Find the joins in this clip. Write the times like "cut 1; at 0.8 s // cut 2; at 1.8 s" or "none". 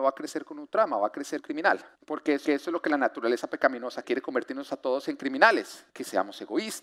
cut 1; at 1.4 s // cut 2; at 2.0 s // cut 3; at 2.5 s // cut 4; at 4.0 s // cut 5; at 5.9 s